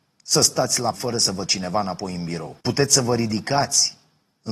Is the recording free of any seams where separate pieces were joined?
no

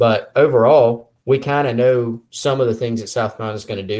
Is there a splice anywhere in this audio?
yes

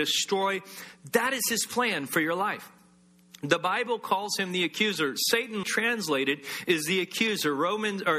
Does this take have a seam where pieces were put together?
yes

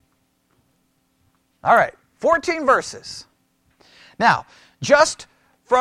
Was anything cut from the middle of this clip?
no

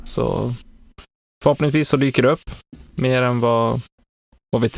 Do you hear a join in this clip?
no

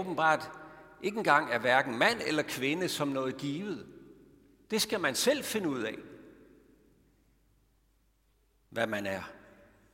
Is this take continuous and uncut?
yes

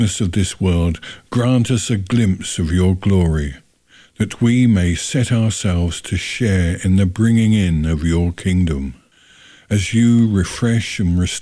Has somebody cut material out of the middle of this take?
no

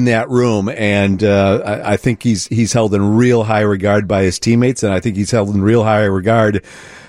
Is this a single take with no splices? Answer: yes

